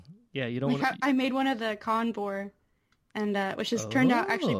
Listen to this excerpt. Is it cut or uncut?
uncut